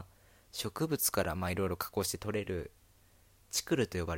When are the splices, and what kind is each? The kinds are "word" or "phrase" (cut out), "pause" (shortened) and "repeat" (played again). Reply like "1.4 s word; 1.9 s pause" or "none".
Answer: none